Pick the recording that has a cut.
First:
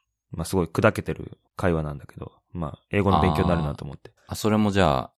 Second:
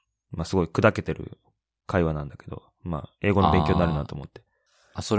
first; 2 cuts; at 1.5 s, 4.2 s

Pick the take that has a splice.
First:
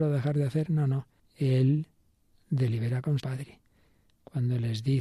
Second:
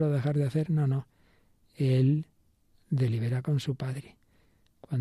first; 2 cuts; at 1.2 s, 3.2 s

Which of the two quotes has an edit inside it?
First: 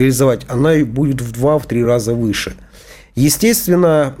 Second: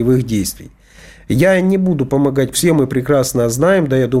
second; 1 cut; at 2.5 s

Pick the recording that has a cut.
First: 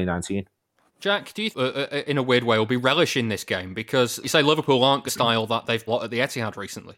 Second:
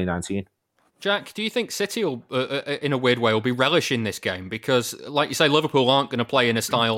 first; 4 cuts; at 1.5 s, 4.2 s, 5.1 s, 5.9 s

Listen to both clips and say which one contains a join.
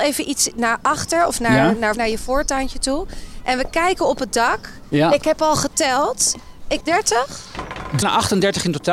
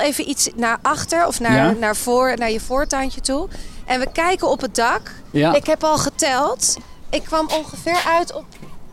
first; 3 cuts; at 1.9 s, 6.8 s, 8.0 s

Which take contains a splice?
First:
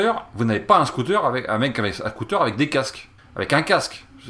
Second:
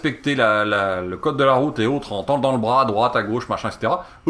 first; 1 cut; at 3.2 s

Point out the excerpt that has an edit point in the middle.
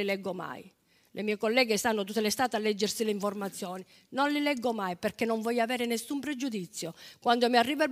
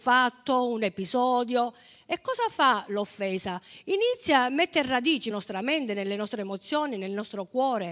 second; 1 cut; at 5.3 s

